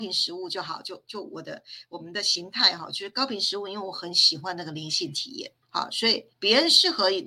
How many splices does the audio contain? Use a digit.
2